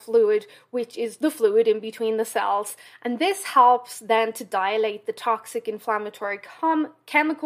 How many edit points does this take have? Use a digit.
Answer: 0